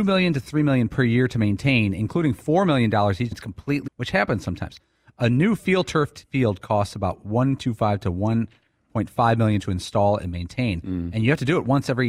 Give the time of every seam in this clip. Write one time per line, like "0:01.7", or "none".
0:03.3
0:03.9
0:07.6
0:09.6